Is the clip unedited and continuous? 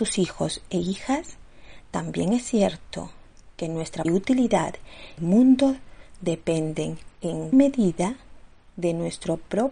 no; 3 cuts; at 4.0 s, 5.2 s, 7.5 s

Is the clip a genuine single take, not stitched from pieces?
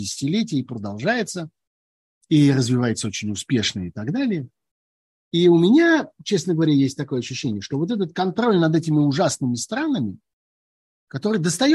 yes; 0 cuts

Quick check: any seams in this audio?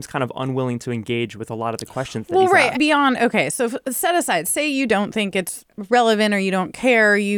yes; 1 cut; at 2.7 s

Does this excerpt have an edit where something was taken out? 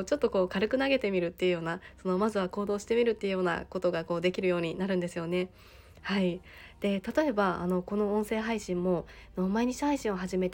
no; 0 cuts

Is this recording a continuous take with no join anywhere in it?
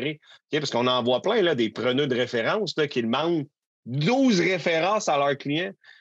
yes; 0 cuts

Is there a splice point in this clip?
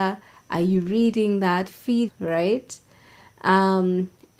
yes; 2 cuts; at 1.7 s, 2.1 s

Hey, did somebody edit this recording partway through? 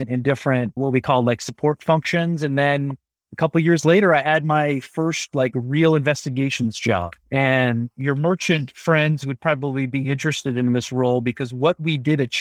no; 0 cuts

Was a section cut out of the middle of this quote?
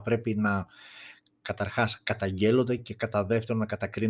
no; 0 cuts

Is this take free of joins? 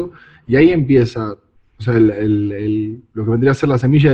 yes; 0 cuts

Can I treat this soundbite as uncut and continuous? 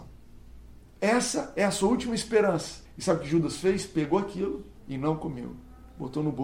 no; 2 cuts; at 2.9 s, 4.8 s

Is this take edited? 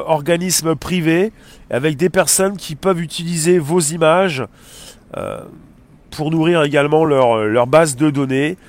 no; 0 cuts

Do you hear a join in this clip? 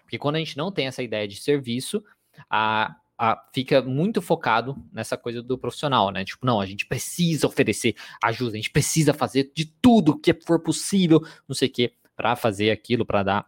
yes; 1 cut; at 5.4 s

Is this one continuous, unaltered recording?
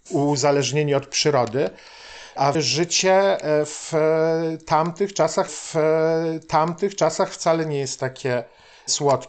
no; 2 cuts; at 2.5 s, 5.5 s

